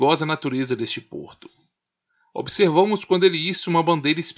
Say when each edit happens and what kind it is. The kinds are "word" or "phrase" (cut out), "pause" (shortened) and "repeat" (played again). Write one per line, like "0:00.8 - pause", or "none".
none